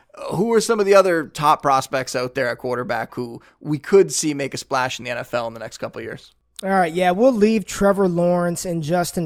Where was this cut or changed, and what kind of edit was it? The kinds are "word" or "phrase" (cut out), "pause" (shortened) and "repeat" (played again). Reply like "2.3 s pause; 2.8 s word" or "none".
none